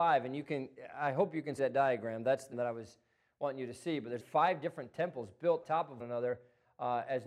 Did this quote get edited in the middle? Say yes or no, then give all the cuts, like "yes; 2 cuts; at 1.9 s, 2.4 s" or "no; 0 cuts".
yes; 5 cuts; at 1.6 s, 2.5 s, 4.2 s, 5.6 s, 6.0 s